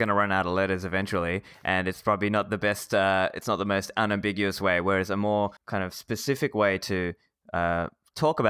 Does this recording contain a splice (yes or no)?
yes